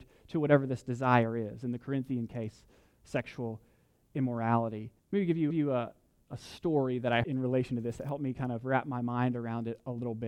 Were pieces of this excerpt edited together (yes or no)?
yes